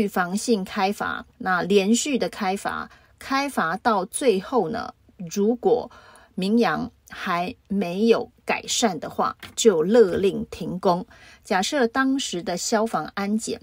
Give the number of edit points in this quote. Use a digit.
1